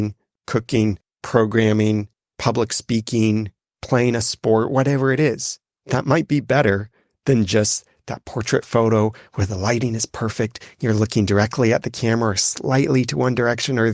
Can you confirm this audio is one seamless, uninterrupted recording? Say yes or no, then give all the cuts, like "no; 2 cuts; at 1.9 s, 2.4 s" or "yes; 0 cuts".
yes; 0 cuts